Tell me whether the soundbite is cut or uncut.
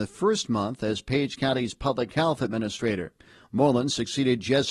uncut